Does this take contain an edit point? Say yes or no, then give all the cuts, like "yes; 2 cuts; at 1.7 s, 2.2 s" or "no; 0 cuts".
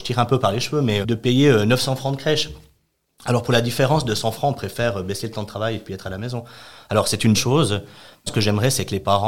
yes; 3 cuts; at 1.0 s, 7.3 s, 8.3 s